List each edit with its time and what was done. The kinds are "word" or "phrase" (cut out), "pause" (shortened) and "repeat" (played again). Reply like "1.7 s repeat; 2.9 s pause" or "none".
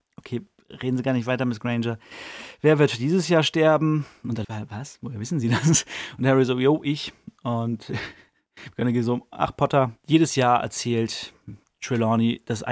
4.4 s word